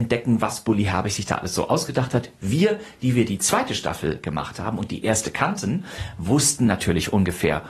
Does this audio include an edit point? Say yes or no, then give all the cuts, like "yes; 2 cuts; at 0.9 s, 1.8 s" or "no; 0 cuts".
no; 0 cuts